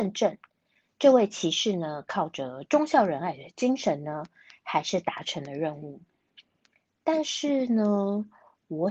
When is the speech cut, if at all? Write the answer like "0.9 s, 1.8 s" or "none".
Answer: none